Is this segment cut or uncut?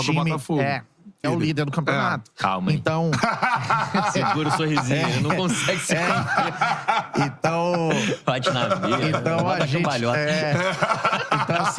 cut